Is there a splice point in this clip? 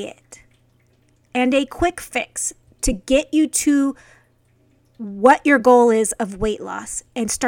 no; 0 cuts

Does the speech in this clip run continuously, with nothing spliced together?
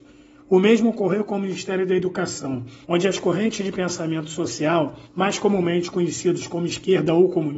no; 2 cuts; at 2.8 s, 5.0 s

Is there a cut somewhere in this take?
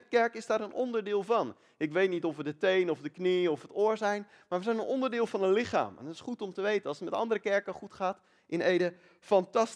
no; 0 cuts

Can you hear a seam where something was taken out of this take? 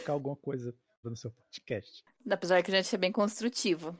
yes; 1 cut; at 1.0 s

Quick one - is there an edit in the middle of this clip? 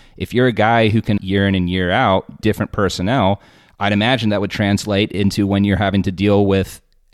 yes; 2 cuts; at 1.2 s, 2.4 s

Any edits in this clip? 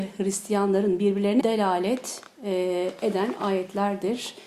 yes; 1 cut; at 1.4 s

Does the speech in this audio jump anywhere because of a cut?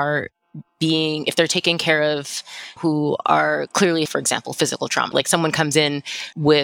yes; 3 cuts; at 2.8 s, 4.1 s, 5.1 s

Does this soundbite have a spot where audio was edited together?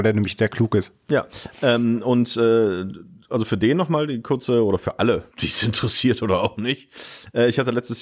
yes; 1 cut; at 5.3 s

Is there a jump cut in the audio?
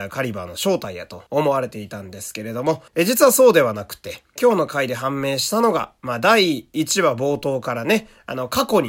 yes; 3 cuts; at 1.3 s, 2.9 s, 4.4 s

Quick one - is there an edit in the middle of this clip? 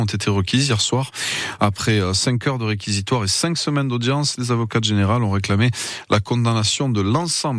no; 0 cuts

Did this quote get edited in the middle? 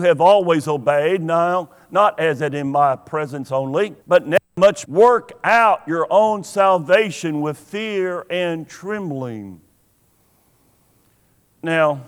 yes; 2 cuts; at 4.0 s, 4.8 s

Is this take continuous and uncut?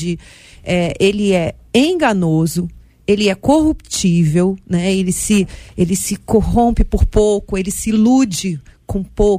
yes; 0 cuts

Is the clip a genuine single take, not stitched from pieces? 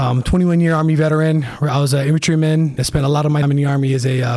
no; 2 cuts; at 2.8 s, 3.4 s

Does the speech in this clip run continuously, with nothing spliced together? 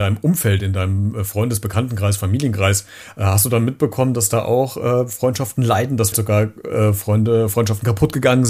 no; 1 cut; at 6.1 s

